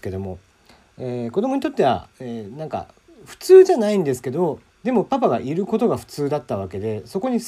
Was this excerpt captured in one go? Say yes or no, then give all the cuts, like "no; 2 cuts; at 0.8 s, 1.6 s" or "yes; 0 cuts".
no; 2 cuts; at 2.1 s, 4.7 s